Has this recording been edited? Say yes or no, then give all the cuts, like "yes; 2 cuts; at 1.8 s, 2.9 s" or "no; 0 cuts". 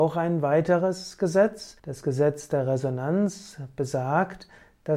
yes; 1 cut; at 1.8 s